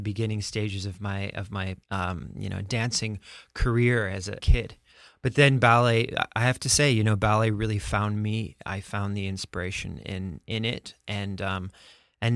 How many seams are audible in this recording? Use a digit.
2